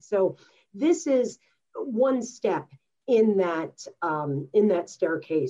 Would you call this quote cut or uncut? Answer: uncut